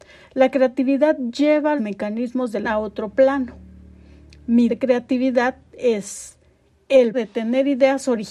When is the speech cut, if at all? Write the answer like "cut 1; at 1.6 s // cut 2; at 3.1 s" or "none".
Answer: cut 1; at 1.8 s // cut 2; at 2.6 s // cut 3; at 4.7 s // cut 4; at 7.1 s